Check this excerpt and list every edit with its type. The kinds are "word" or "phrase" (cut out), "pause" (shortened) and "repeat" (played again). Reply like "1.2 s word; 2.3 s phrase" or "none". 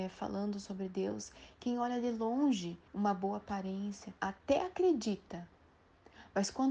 2.9 s pause; 4.2 s pause